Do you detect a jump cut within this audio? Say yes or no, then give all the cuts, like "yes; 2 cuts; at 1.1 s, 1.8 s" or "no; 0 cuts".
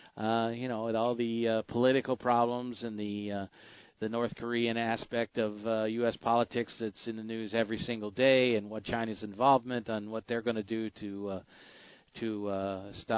no; 0 cuts